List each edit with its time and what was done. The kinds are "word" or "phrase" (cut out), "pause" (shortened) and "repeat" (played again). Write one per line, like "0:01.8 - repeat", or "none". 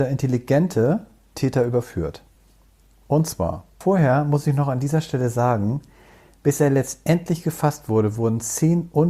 none